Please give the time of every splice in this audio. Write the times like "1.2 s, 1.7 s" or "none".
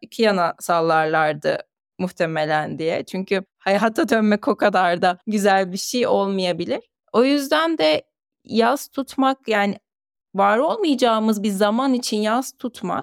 none